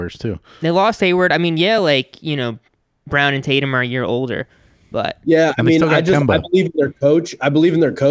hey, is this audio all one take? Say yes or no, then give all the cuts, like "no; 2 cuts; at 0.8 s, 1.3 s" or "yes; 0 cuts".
yes; 0 cuts